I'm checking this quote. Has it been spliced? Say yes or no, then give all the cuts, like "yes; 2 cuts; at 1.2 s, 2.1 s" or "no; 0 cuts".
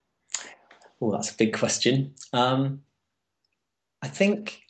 no; 0 cuts